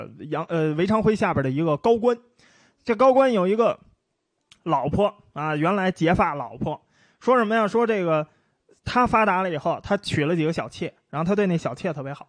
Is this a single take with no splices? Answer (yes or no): yes